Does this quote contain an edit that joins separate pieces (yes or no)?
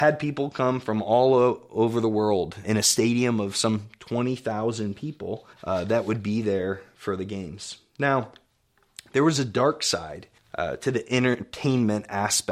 yes